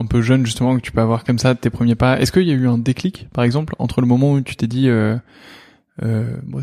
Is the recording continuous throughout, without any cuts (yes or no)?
yes